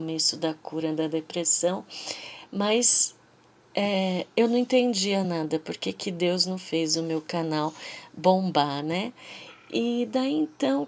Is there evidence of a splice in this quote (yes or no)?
no